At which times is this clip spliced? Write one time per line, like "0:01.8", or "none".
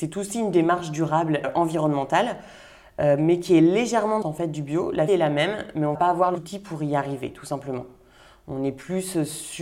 0:01.4
0:04.2
0:05.1
0:05.9
0:06.3